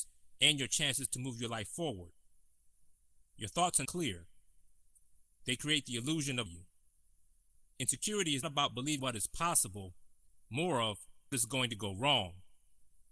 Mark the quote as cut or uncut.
cut